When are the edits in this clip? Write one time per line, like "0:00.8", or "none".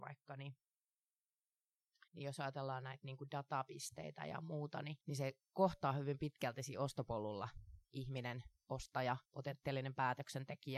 0:02.1
0:05.0
0:07.8
0:09.3